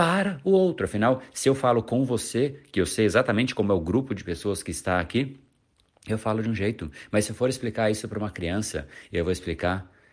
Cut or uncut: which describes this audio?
uncut